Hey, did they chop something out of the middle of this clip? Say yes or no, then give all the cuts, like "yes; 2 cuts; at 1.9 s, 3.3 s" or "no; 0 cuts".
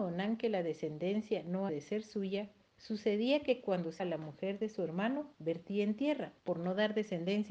yes; 5 cuts; at 1.7 s, 2.6 s, 4.0 s, 5.3 s, 6.4 s